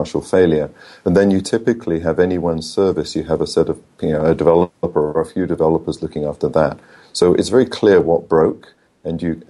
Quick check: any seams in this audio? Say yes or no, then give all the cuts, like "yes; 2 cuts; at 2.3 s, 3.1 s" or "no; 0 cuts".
no; 0 cuts